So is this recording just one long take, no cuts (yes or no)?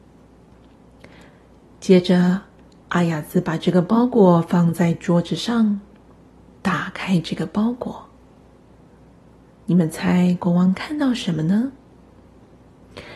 yes